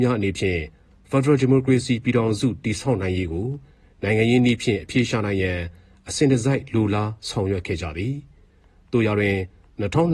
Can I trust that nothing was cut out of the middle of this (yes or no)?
yes